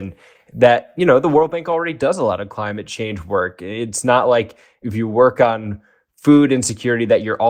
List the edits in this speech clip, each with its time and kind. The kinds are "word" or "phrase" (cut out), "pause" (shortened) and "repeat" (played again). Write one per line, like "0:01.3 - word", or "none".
none

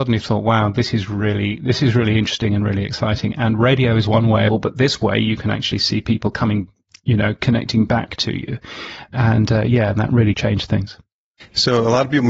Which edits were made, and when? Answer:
0:04.5 - phrase

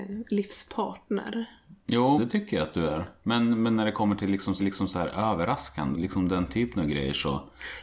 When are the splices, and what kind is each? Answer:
0:02.2 - word
0:04.6 - repeat
0:05.9 - phrase

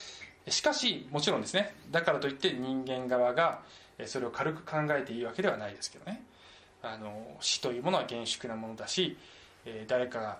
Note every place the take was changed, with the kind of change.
none

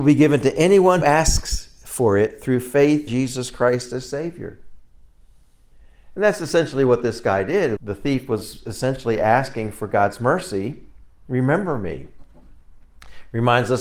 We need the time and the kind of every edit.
0:01.0 - word
0:03.1 - word
0:07.8 - word

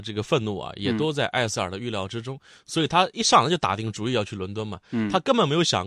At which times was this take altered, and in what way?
none

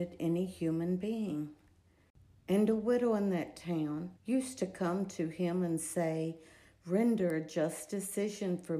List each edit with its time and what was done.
0:04.2 - pause

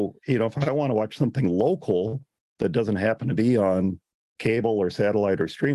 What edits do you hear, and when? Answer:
none

